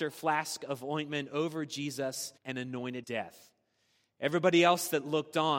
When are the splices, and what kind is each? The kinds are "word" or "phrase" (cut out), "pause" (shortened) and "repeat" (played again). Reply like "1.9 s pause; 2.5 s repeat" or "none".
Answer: 2.4 s pause; 3.0 s phrase

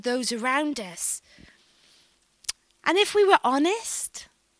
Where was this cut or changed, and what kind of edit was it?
none

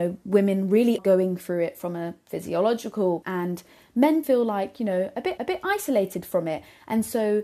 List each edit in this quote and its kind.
1.0 s word; 3.2 s word; 4.2 s word; 5.4 s repeat

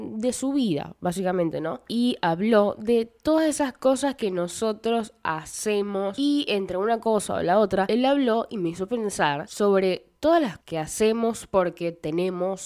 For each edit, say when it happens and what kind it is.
10.6 s word

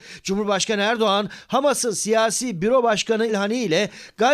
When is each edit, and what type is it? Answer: 3.3 s word

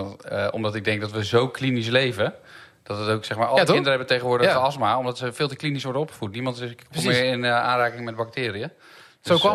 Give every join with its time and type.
none

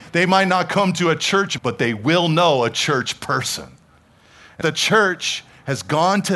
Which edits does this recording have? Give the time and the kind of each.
1.6 s word; 4.6 s phrase

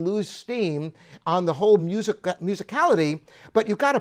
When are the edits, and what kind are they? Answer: none

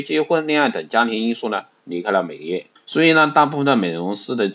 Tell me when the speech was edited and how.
2.8 s pause

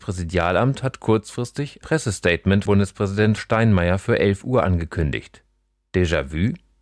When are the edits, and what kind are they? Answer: 1.8 s word; 2.7 s word; 3.4 s word

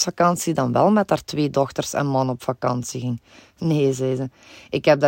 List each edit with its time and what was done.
none

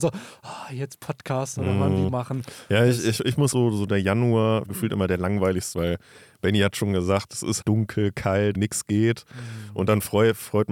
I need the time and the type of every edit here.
2.1 s word; 3.5 s phrase; 4.6 s phrase; 5.7 s phrase; 7.6 s word; 8.5 s word

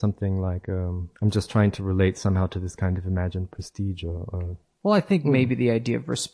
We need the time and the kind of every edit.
1.2 s pause

